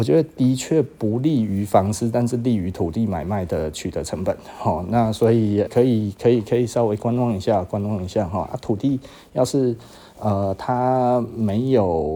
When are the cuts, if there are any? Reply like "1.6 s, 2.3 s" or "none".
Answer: 5.7 s